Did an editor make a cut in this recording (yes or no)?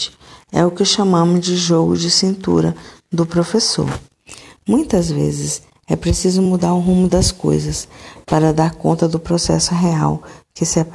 no